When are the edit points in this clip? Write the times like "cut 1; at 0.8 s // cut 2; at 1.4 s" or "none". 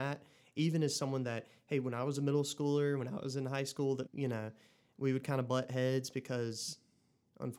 cut 1; at 4.1 s